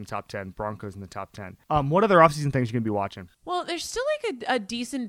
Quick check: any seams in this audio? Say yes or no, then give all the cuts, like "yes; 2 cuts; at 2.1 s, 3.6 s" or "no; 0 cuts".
yes; 2 cuts; at 1.6 s, 3.3 s